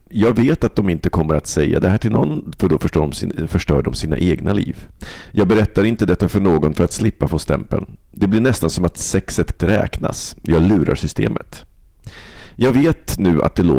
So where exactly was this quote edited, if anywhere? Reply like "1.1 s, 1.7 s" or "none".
9.6 s